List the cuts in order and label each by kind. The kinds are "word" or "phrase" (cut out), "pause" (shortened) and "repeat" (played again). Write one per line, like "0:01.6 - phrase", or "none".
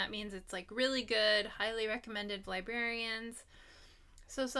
0:02.4 - phrase